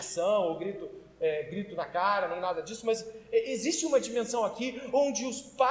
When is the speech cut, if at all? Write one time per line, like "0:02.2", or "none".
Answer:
none